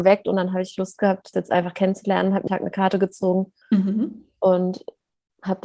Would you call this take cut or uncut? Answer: cut